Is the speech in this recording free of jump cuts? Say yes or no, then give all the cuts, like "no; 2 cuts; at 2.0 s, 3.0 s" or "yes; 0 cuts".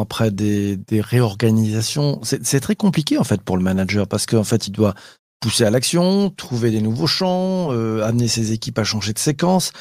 yes; 0 cuts